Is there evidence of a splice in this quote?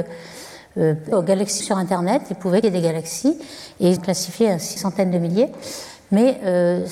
yes; 5 cuts; at 1.1 s, 1.6 s, 2.6 s, 4.0 s, 4.8 s

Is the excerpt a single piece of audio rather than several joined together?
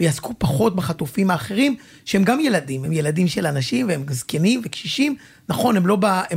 yes; 0 cuts

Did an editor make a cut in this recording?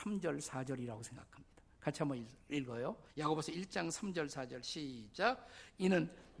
yes; 1 cut; at 3.1 s

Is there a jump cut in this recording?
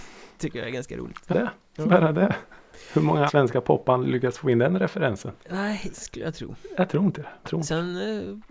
yes; 4 cuts; at 1.3 s, 3.3 s, 5.9 s, 7.4 s

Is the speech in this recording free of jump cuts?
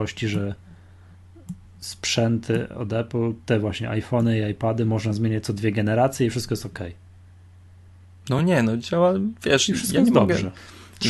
yes; 0 cuts

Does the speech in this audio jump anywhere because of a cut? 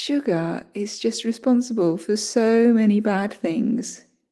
no; 0 cuts

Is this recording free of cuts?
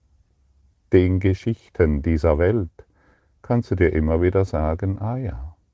yes; 0 cuts

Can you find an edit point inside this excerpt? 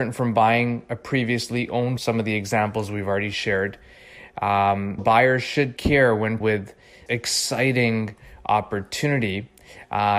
yes; 5 cuts; at 2.0 s, 5.0 s, 5.8 s, 6.4 s, 7.1 s

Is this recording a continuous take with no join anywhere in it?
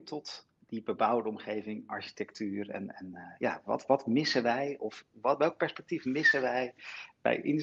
yes; 0 cuts

